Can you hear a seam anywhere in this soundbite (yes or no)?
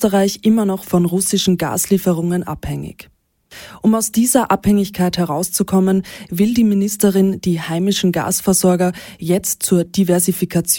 no